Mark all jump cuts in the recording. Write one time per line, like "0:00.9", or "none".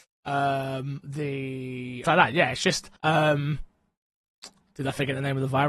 0:01.0
0:02.0
0:03.0